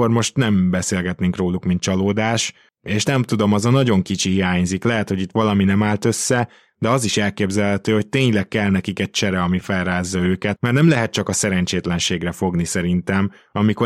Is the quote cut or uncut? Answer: cut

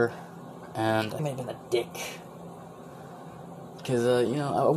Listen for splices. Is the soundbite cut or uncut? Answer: cut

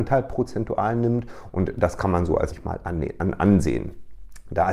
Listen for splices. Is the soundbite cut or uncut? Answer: cut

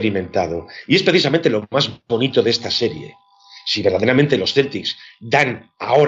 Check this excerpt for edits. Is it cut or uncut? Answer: uncut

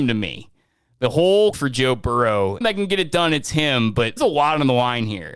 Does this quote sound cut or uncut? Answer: cut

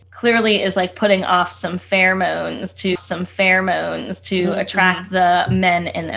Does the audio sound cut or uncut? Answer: cut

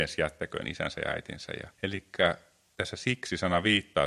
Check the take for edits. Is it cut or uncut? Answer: cut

